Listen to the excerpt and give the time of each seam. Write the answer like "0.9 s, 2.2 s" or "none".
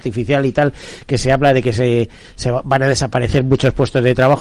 none